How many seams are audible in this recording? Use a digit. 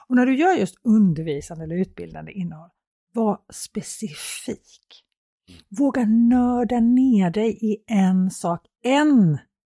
0